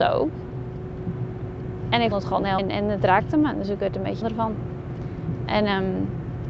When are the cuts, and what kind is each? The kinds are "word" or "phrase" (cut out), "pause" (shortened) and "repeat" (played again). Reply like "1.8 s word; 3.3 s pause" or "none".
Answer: 2.1 s word; 2.6 s word; 4.2 s word